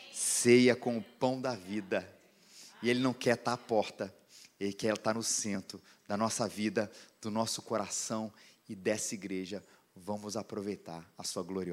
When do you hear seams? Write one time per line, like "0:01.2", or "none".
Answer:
none